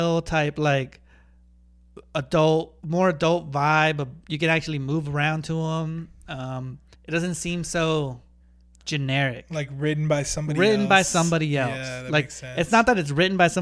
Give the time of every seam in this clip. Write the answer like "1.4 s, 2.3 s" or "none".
2.8 s, 4.2 s, 6.9 s, 8.4 s